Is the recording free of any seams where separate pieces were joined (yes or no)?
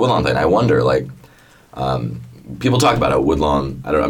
yes